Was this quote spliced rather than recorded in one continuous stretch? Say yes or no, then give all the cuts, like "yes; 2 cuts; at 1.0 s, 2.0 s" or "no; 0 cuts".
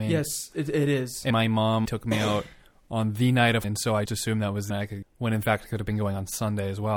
yes; 6 cuts; at 1.3 s, 1.9 s, 3.6 s, 4.1 s, 4.7 s, 5.0 s